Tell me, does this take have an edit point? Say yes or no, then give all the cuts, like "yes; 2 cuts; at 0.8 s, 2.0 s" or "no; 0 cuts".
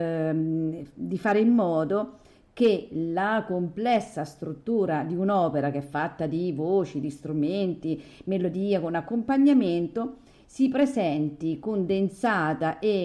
no; 0 cuts